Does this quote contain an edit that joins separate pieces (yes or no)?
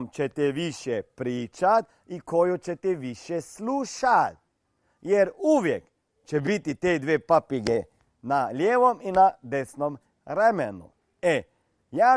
no